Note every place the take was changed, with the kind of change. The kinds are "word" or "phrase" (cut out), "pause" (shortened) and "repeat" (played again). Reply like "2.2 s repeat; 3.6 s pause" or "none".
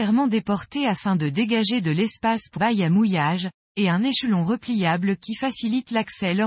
2.6 s word